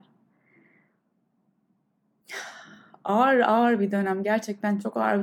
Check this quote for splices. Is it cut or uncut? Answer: uncut